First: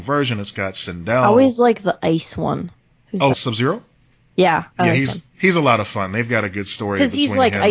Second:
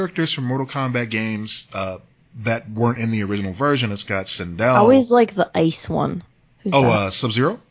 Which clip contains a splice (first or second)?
first